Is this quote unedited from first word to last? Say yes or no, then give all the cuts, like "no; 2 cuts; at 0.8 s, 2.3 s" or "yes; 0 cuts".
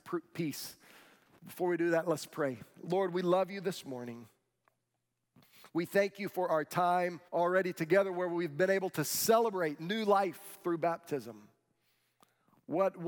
no; 1 cut; at 7.3 s